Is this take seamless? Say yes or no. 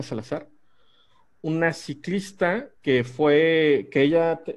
no